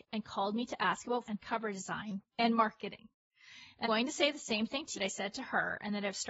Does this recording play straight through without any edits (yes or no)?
no